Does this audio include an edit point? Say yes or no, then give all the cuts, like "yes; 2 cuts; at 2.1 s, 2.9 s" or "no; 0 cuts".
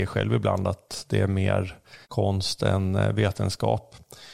yes; 1 cut; at 2.0 s